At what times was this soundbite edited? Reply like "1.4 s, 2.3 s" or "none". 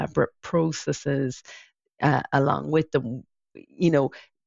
none